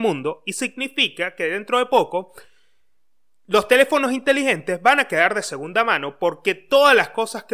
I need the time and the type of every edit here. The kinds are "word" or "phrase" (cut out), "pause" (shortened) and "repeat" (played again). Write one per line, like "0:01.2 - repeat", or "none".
none